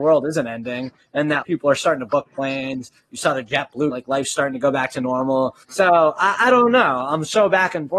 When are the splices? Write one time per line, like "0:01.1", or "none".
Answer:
0:01.4
0:03.9
0:05.6